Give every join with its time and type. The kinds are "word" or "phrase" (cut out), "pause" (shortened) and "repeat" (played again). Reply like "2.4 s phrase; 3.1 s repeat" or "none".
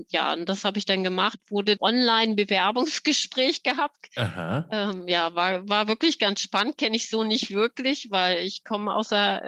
1.8 s phrase